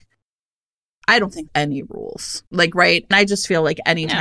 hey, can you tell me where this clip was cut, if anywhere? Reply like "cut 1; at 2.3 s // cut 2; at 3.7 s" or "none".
cut 1; at 1.5 s // cut 2; at 2.5 s // cut 3; at 3.1 s